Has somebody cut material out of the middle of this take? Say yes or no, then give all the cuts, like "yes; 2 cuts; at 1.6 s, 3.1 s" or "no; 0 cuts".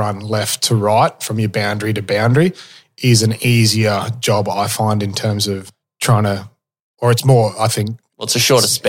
no; 0 cuts